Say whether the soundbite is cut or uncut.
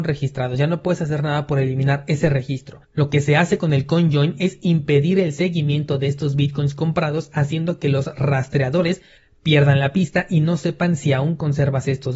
cut